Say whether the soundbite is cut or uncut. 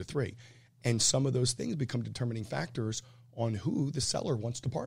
uncut